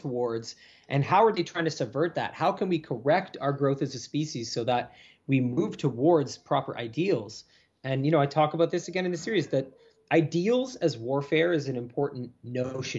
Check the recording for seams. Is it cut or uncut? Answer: uncut